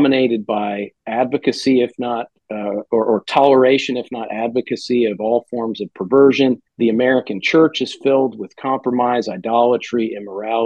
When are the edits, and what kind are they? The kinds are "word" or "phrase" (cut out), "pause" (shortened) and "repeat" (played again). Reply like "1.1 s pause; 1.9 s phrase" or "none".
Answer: 1.0 s pause; 6.7 s pause